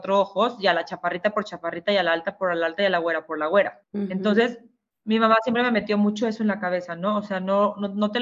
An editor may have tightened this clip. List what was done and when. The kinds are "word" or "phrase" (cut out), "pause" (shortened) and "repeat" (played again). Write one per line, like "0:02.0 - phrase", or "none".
0:03.8 - pause